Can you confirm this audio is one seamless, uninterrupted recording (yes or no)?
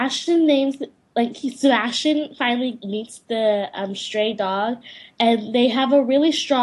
yes